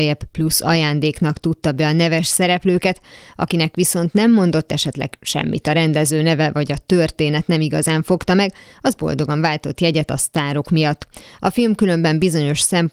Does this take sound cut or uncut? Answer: uncut